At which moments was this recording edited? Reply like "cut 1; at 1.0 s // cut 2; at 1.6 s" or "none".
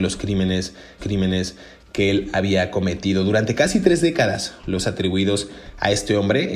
cut 1; at 1.0 s // cut 2; at 4.8 s